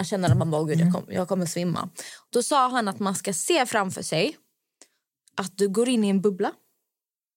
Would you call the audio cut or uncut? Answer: uncut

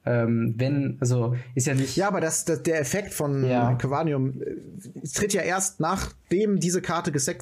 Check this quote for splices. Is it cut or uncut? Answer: uncut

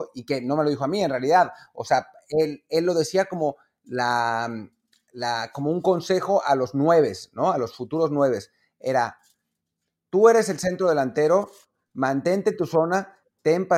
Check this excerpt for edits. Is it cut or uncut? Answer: uncut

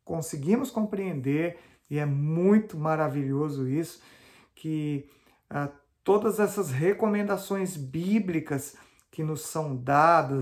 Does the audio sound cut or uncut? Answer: uncut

